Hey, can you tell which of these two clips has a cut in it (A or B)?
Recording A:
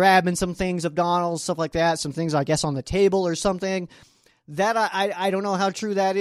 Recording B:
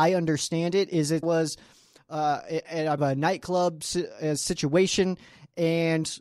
B